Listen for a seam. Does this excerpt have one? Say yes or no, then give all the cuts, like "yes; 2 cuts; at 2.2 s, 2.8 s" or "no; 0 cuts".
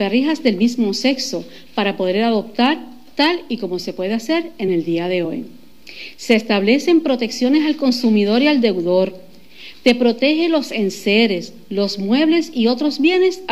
no; 0 cuts